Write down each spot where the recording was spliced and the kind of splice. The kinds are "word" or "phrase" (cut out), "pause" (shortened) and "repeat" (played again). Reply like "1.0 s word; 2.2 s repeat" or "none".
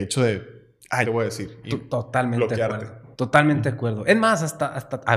1.0 s phrase; 3.1 s pause